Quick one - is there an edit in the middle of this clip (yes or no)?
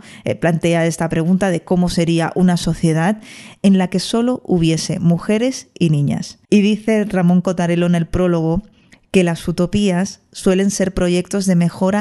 yes